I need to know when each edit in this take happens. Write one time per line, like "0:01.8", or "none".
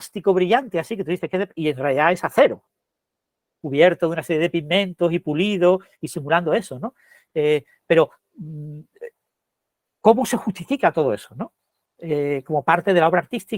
none

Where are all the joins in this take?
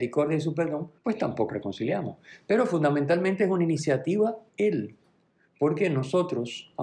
0:01.0
0:01.5
0:04.5

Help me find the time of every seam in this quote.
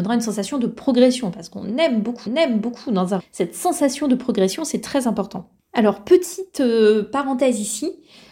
0:02.3
0:03.2
0:05.6

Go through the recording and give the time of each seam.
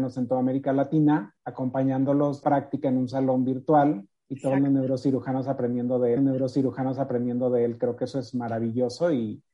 0:01.4
0:02.4
0:04.2
0:06.2

